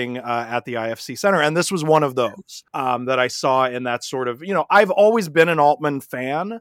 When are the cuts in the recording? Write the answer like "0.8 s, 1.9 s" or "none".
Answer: 2.7 s